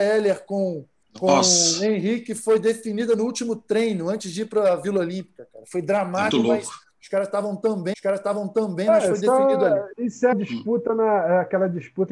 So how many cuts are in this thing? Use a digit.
5